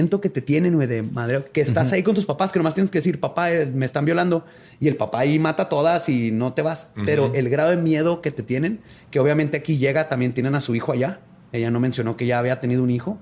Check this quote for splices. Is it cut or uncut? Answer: uncut